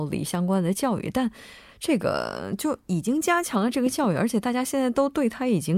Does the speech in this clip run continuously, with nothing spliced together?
yes; 0 cuts

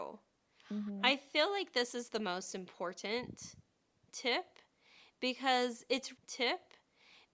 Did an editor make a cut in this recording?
yes; 1 cut; at 6.2 s

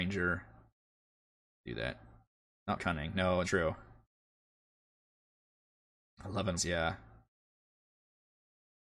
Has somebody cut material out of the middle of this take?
yes; 3 cuts; at 2.8 s, 3.4 s, 6.6 s

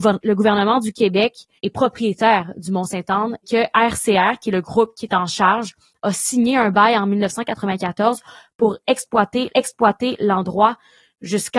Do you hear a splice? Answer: yes; 3 cuts; at 1.6 s, 3.4 s, 9.5 s

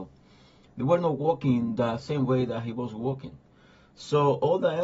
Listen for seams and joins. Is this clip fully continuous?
yes; 0 cuts

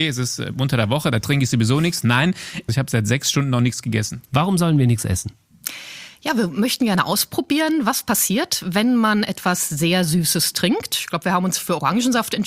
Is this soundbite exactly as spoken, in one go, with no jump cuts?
yes; 0 cuts

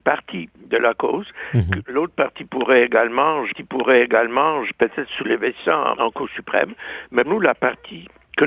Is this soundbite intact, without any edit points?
no; 3 cuts; at 3.5 s, 6.0 s, 7.2 s

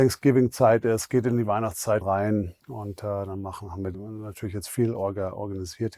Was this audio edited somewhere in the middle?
yes; 3 cuts; at 2.0 s, 2.6 s, 3.9 s

